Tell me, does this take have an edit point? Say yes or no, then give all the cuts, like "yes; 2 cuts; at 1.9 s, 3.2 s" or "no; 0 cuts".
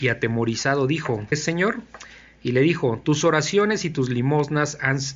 yes; 1 cut; at 1.3 s